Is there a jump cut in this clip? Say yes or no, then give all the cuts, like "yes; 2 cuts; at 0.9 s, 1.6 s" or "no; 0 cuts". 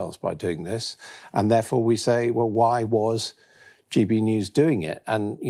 no; 0 cuts